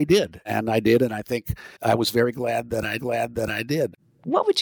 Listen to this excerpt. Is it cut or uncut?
cut